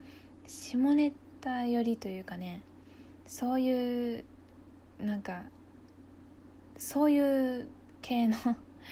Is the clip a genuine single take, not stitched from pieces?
yes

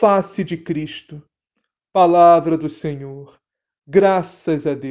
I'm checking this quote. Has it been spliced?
no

